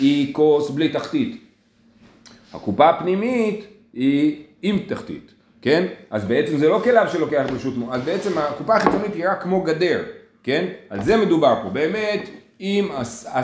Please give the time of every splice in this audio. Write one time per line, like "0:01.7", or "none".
none